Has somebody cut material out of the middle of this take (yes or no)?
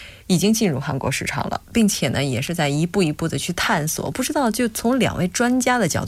no